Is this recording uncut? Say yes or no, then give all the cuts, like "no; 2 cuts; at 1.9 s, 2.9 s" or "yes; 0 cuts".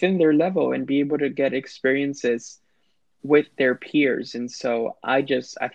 yes; 0 cuts